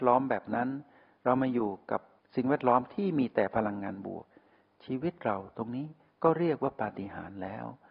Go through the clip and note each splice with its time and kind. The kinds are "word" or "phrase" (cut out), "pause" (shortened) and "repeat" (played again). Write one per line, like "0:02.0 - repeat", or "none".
none